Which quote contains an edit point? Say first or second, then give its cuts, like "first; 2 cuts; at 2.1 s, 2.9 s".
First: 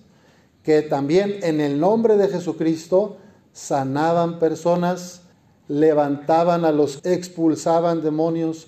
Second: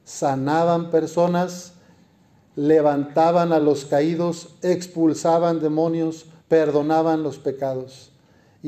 first; 2 cuts; at 5.3 s, 7.0 s